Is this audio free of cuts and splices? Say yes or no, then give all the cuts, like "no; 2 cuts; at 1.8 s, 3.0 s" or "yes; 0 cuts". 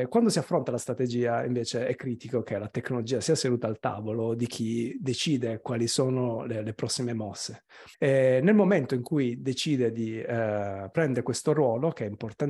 no; 1 cut; at 7.9 s